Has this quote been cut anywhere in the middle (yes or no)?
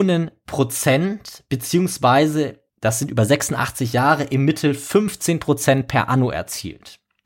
yes